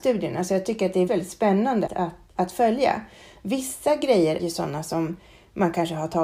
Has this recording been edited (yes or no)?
yes